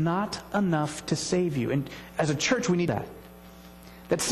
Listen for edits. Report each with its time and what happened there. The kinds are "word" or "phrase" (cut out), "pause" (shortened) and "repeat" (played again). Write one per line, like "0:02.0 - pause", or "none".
0:02.9 - phrase